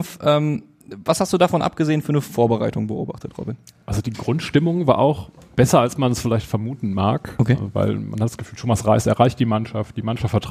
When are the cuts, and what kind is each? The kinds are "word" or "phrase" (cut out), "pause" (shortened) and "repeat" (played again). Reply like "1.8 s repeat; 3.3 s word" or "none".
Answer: none